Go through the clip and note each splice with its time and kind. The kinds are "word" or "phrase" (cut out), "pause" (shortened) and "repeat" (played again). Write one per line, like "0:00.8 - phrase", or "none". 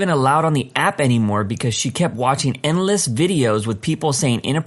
none